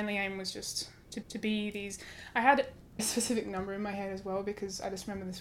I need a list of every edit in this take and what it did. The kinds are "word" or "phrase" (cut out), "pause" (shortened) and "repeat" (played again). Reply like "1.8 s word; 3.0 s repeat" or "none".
1.2 s repeat; 3.0 s word